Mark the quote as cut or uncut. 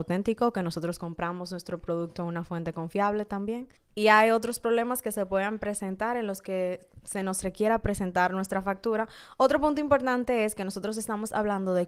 uncut